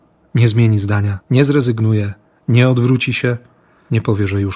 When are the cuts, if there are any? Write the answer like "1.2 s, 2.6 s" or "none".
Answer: 1.2 s